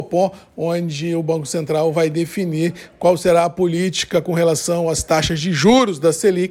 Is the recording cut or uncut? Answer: uncut